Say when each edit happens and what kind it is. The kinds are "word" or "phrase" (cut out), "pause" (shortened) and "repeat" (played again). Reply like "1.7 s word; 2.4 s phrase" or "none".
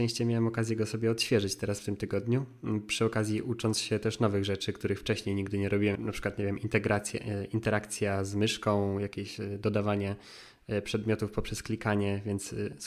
6.0 s word